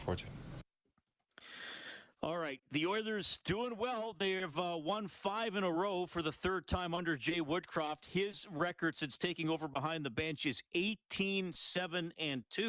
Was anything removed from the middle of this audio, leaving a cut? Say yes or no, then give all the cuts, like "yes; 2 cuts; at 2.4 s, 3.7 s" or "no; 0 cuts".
no; 0 cuts